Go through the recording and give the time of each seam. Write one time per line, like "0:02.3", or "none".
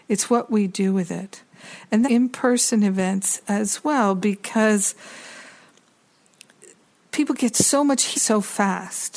0:02.0
0:08.1